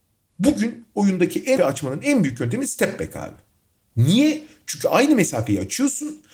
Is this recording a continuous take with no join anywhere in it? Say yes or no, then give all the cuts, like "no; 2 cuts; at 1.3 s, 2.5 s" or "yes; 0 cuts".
no; 1 cut; at 1.6 s